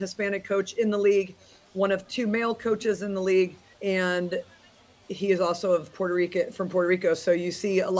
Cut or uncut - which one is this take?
cut